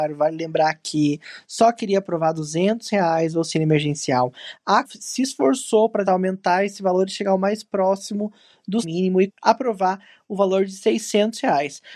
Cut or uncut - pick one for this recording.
cut